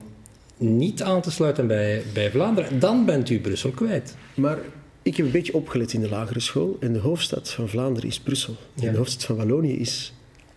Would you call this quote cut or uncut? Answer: uncut